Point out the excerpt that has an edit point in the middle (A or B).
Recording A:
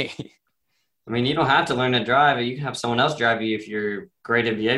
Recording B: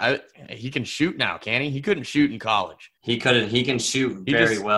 B